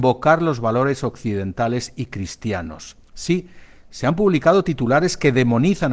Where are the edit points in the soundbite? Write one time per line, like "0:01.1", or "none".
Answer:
0:03.0